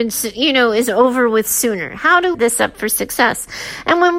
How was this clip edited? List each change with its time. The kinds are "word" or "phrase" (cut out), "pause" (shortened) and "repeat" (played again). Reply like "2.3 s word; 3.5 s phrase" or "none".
2.3 s phrase